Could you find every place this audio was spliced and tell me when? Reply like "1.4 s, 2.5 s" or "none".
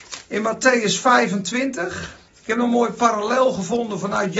2.3 s